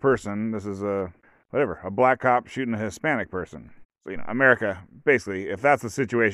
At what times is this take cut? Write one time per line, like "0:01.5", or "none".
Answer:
0:01.2